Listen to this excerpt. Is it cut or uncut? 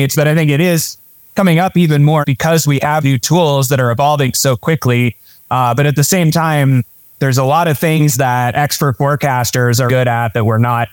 cut